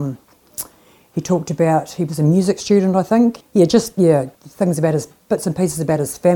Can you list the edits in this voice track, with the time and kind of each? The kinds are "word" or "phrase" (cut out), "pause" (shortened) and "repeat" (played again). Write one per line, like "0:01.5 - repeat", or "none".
0:03.4 - word
0:04.3 - pause